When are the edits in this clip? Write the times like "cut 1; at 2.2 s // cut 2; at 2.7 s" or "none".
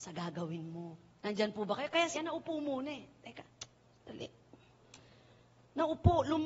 cut 1; at 1.2 s // cut 2; at 2.1 s